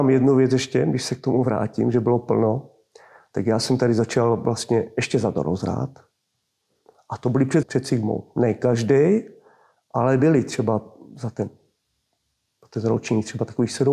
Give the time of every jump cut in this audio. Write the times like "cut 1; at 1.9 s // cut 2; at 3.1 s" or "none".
cut 1; at 7.6 s